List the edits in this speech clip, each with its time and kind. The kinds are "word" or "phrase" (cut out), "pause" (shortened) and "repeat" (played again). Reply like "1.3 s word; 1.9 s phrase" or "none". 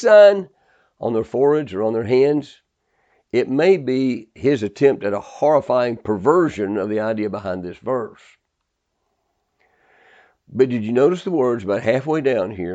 none